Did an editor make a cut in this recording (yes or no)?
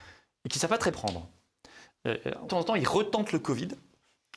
yes